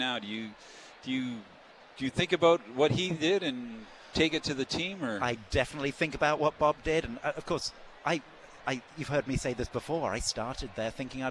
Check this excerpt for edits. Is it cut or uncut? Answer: uncut